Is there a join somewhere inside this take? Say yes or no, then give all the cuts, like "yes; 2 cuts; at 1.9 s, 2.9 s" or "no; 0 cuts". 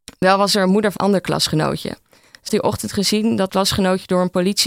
yes; 3 cuts; at 1.0 s, 2.5 s, 3.5 s